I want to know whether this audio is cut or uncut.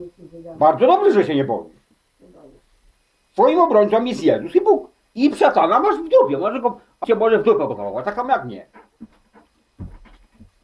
cut